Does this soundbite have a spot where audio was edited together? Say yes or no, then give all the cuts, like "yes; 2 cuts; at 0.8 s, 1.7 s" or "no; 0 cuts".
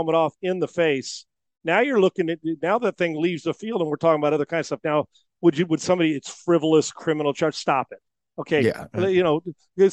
no; 0 cuts